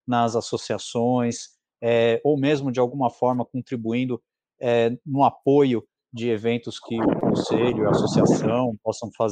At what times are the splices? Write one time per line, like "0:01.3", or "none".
none